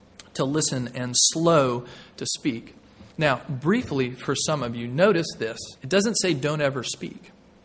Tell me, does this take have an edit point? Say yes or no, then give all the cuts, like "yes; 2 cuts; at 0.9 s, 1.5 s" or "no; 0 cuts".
yes; 2 cuts; at 3.1 s, 5.8 s